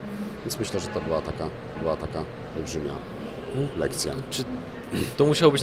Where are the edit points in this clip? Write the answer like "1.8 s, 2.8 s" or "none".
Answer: 1.8 s

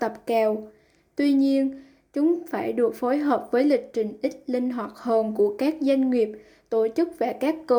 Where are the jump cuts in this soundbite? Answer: none

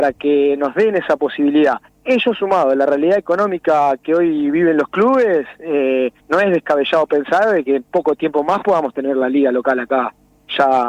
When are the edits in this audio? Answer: 1.9 s, 6.2 s

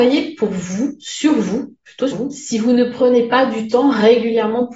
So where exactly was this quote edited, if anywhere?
2.1 s

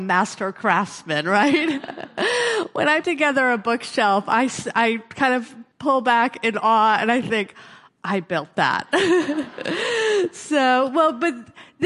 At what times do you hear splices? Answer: 3.0 s, 5.7 s

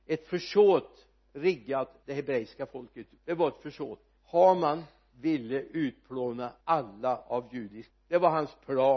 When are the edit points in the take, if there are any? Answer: 2.0 s, 3.2 s, 4.2 s, 6.6 s, 7.9 s

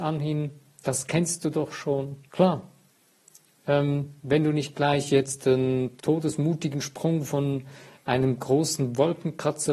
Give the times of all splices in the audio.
2.3 s, 4.2 s, 6.0 s

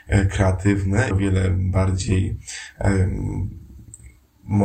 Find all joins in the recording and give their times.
1.1 s

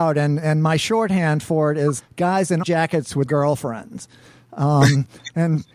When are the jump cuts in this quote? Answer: 2.0 s, 2.6 s, 3.3 s

